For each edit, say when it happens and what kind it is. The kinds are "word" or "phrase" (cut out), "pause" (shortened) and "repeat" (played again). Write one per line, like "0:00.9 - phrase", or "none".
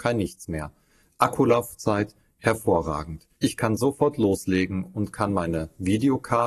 0:03.4 - pause